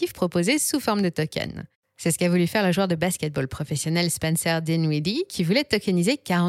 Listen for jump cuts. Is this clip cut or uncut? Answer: uncut